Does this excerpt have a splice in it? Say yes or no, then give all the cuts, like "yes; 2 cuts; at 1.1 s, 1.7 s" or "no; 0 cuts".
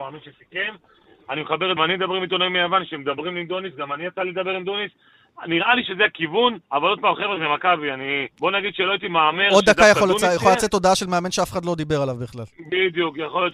yes; 3 cuts; at 1.8 s, 6.6 s, 8.3 s